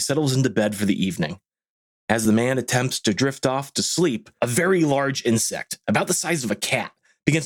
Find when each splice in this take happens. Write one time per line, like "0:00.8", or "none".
none